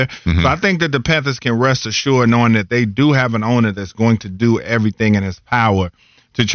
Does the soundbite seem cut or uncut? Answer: uncut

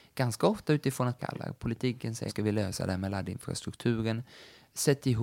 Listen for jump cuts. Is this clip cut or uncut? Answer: cut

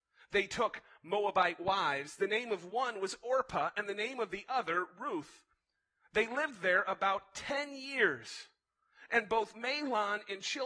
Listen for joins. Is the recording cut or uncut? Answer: uncut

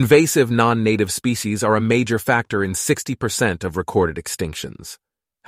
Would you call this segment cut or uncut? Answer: uncut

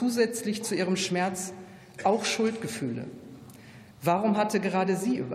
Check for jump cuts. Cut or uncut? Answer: cut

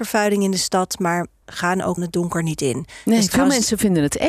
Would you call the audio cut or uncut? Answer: cut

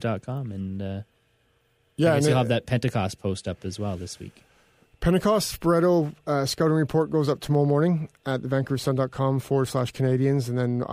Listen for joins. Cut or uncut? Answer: uncut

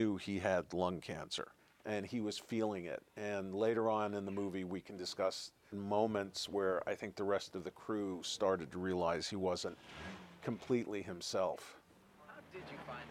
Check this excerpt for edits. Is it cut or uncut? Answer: cut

